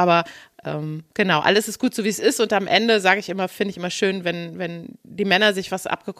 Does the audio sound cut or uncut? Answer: uncut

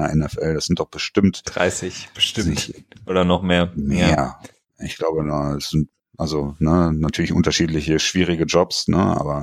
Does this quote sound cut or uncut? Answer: uncut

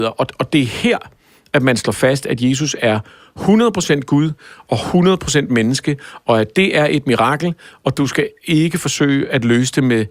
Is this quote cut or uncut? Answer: uncut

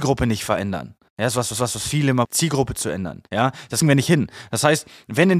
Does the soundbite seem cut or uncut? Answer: cut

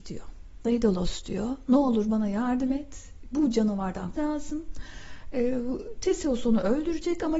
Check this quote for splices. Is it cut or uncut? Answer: cut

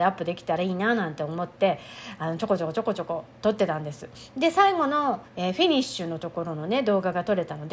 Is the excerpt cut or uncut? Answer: cut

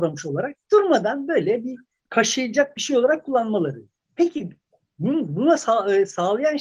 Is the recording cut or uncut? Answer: uncut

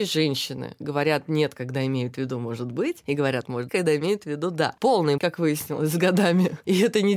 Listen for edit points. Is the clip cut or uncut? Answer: cut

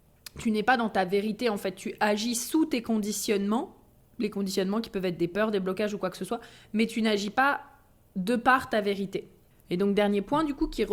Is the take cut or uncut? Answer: uncut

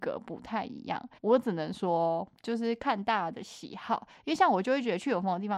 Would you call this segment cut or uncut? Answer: cut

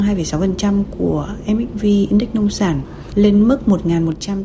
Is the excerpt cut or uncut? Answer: uncut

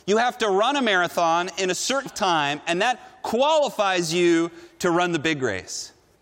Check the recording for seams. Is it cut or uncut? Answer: cut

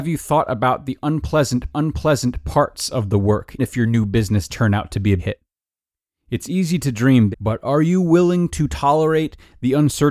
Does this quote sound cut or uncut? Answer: cut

